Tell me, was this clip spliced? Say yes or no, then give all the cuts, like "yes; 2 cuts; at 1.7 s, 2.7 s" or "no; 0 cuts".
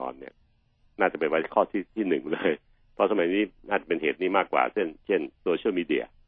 yes; 2 cuts; at 5.0 s, 5.3 s